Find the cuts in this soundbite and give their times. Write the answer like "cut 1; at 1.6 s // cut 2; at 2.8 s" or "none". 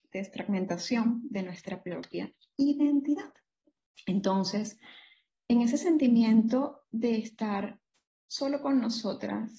none